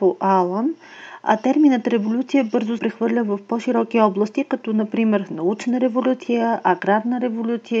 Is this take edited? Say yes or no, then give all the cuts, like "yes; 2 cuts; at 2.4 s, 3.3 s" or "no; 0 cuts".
yes; 1 cut; at 2.8 s